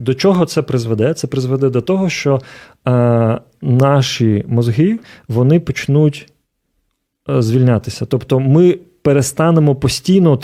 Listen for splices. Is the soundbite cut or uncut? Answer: uncut